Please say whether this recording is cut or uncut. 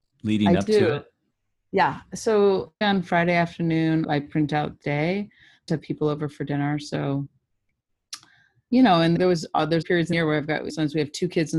cut